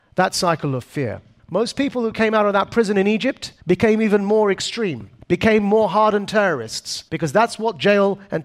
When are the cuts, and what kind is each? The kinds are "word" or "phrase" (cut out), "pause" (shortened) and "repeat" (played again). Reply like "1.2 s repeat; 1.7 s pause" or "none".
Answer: 1.4 s pause; 3.6 s pause; 5.2 s pause; 7.1 s pause

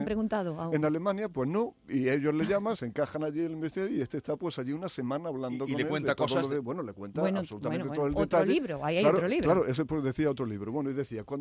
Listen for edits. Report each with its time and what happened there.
2.7 s word

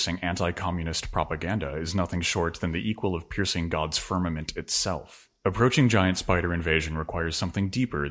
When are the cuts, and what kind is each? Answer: 5.4 s pause

